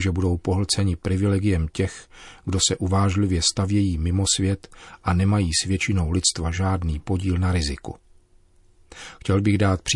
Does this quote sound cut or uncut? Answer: uncut